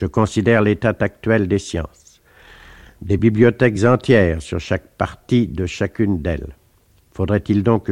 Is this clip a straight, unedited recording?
yes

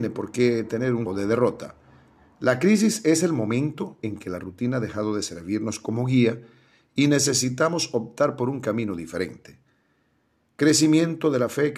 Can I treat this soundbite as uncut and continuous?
no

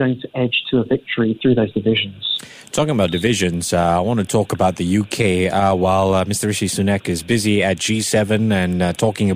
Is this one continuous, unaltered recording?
yes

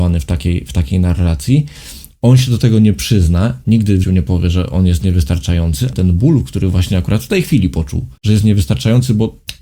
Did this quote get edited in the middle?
yes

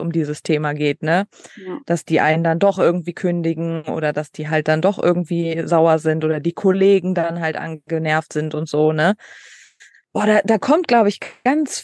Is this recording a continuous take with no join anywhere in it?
yes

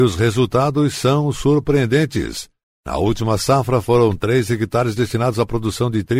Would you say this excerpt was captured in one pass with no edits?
yes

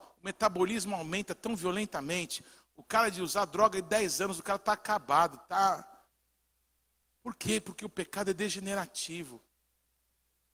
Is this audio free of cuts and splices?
yes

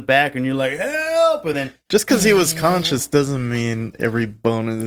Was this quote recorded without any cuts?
yes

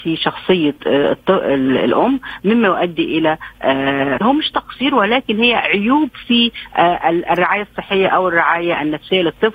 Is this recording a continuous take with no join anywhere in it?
no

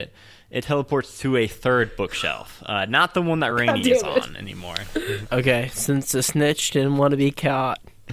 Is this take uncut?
yes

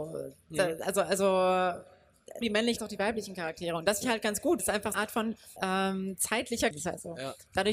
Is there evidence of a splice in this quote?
yes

